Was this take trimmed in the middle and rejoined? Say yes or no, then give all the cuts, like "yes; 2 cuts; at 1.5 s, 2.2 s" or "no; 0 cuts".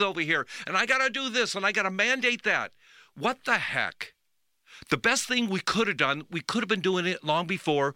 no; 0 cuts